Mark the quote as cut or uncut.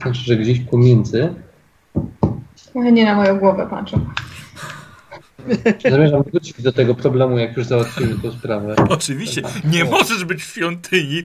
cut